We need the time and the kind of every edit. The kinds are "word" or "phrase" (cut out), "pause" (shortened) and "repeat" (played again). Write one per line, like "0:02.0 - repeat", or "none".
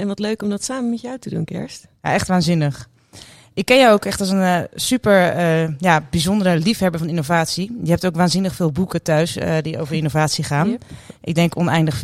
none